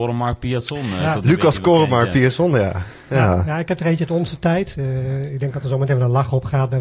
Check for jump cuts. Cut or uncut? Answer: uncut